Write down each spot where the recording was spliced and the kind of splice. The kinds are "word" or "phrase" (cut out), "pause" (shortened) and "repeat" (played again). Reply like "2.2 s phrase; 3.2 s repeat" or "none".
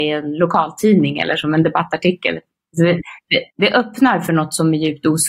3.5 s pause